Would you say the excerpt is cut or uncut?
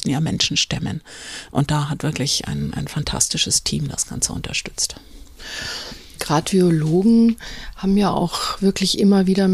uncut